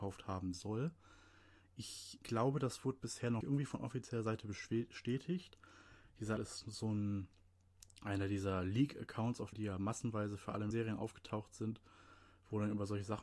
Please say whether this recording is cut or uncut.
cut